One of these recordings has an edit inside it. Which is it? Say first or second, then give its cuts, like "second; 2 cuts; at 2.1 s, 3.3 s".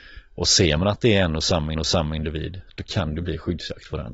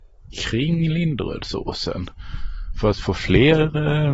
first; 1 cut; at 1.8 s